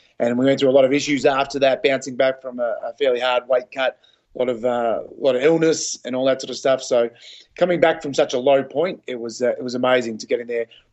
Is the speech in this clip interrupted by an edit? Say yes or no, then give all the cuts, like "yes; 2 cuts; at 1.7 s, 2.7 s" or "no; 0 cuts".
no; 0 cuts